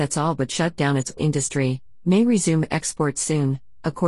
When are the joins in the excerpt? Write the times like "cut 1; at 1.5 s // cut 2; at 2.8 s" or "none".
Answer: cut 1; at 1.2 s